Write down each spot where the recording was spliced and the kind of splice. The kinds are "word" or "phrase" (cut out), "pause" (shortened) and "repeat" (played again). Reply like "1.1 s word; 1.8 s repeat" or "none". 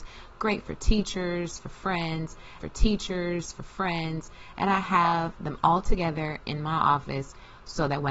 2.6 s repeat